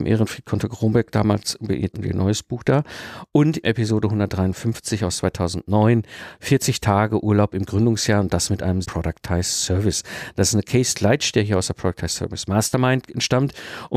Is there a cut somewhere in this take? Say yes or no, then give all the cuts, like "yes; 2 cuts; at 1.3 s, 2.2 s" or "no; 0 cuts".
yes; 4 cuts; at 1.9 s, 3.6 s, 8.8 s, 10.9 s